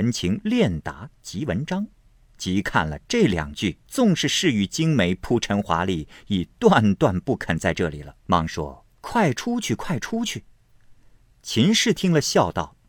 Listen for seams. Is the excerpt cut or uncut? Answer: cut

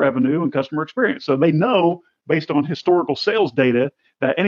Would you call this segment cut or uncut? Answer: uncut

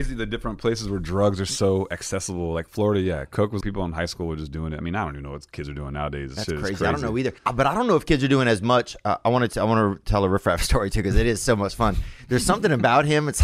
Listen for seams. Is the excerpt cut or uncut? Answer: cut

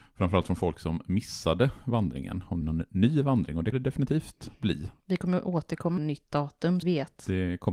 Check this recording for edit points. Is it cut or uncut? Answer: cut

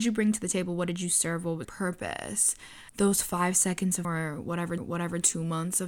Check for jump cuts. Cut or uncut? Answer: cut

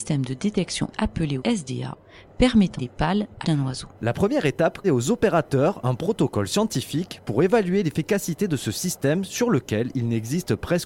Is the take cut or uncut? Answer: cut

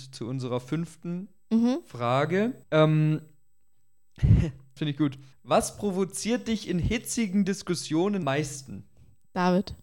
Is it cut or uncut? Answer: cut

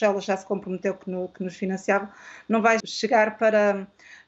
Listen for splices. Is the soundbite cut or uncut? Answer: cut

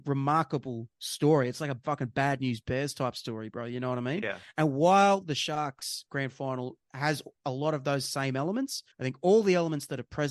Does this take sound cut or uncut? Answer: cut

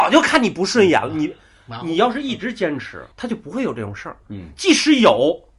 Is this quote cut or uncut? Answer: cut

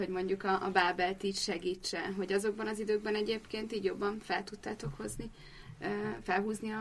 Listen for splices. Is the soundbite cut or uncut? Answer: uncut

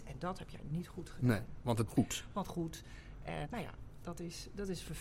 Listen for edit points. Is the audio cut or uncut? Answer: cut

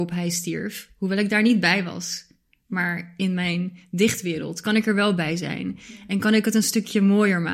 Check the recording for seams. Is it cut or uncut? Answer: uncut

